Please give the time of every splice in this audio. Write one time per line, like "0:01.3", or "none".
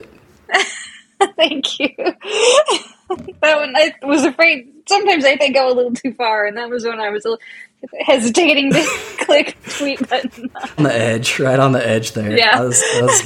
0:05.4
0:09.6
0:10.8